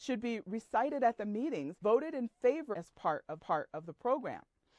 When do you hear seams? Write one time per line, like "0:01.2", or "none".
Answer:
0:01.8
0:02.7
0:03.4